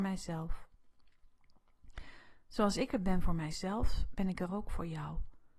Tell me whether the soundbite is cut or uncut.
uncut